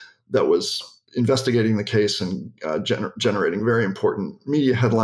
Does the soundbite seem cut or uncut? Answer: uncut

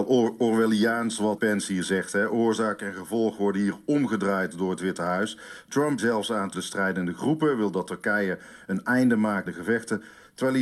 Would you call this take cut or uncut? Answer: cut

